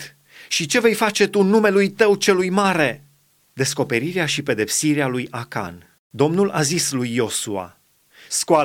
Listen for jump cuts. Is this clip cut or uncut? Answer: cut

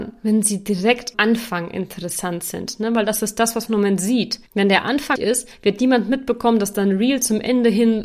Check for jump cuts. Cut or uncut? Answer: cut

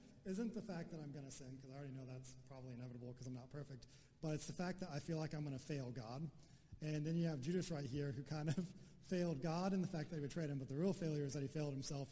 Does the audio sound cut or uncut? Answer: uncut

